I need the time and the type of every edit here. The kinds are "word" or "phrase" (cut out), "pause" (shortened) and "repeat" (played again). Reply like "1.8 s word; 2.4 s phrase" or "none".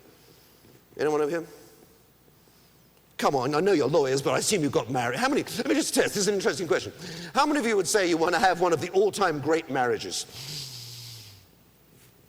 none